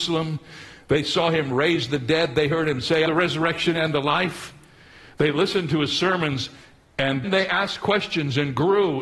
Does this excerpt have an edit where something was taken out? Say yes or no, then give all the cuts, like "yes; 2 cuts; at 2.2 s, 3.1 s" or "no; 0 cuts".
yes; 2 cuts; at 3.1 s, 7.2 s